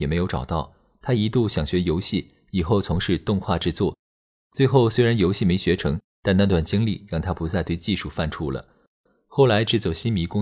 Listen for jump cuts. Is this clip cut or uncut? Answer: uncut